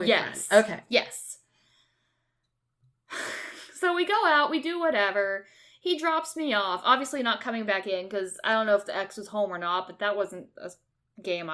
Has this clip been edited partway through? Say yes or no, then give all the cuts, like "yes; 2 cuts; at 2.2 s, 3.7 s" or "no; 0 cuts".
no; 0 cuts